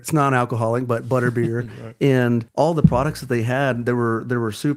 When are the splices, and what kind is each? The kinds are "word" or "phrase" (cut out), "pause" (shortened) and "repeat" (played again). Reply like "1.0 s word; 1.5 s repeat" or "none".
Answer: 2.5 s pause